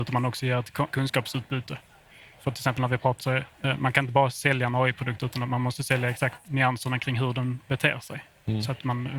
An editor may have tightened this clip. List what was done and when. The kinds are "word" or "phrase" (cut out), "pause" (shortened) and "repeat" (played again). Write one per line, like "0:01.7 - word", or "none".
0:00.9 - word
0:03.2 - phrase
0:03.5 - pause
0:06.4 - phrase